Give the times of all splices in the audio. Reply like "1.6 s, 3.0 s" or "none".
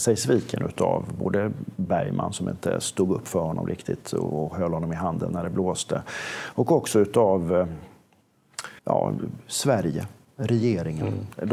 8.8 s